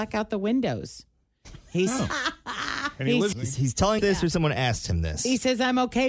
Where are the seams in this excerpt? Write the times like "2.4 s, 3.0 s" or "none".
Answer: 3.3 s, 4.0 s